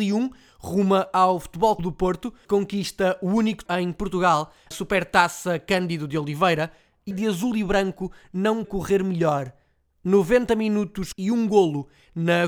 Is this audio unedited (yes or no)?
no